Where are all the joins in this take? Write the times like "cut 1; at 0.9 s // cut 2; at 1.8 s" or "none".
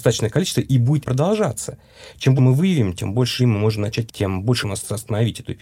cut 1; at 1.0 s // cut 2; at 2.4 s // cut 3; at 3.4 s // cut 4; at 4.1 s // cut 5; at 4.6 s